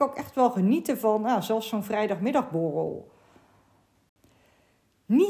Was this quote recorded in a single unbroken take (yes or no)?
yes